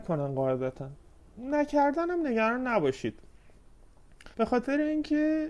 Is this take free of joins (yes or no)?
no